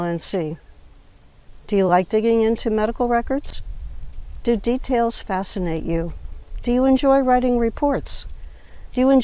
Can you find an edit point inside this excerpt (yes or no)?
no